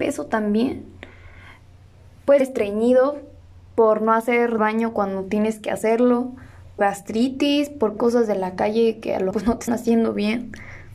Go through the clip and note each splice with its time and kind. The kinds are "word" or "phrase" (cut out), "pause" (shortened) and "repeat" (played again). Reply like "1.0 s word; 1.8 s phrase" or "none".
2.4 s word; 4.6 s word; 6.8 s word; 8.0 s word; 9.3 s word; 9.7 s word